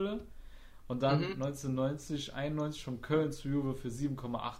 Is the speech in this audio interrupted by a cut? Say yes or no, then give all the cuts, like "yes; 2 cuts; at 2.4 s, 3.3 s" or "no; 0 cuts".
no; 0 cuts